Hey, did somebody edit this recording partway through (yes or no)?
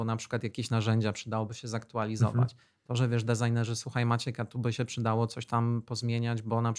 no